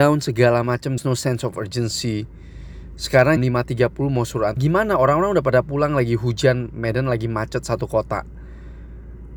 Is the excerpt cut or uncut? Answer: cut